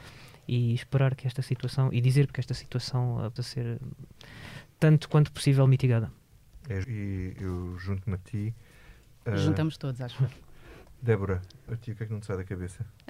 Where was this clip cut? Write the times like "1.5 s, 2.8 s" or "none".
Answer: 2.3 s, 3.4 s, 6.8 s